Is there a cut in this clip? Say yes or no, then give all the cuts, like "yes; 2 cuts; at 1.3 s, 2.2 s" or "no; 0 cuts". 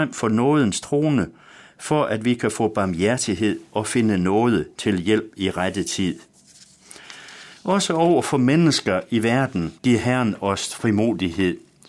yes; 1 cut; at 9.8 s